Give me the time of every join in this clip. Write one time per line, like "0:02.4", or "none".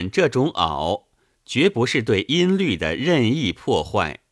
none